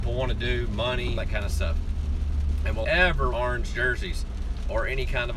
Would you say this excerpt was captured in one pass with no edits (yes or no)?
no